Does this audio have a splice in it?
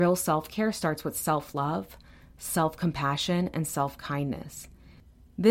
no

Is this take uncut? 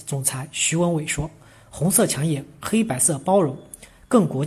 yes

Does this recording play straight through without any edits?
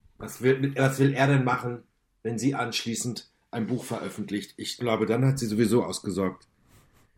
yes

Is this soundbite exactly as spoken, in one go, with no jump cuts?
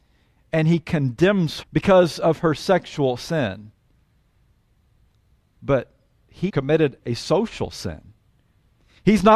no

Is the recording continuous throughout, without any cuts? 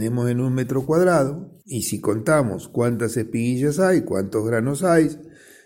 no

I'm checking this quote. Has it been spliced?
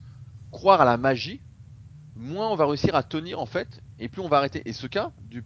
no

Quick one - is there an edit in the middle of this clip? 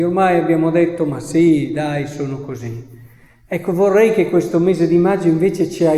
no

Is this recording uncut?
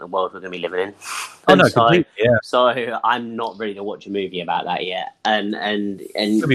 yes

